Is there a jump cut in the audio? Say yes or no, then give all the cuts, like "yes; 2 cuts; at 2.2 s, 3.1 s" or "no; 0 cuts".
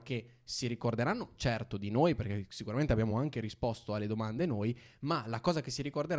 no; 0 cuts